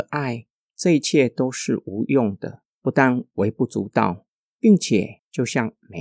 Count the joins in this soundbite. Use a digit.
1